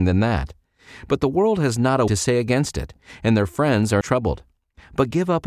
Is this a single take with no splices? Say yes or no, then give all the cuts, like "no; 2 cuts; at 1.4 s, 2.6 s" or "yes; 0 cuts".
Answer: no; 2 cuts; at 2.1 s, 4.0 s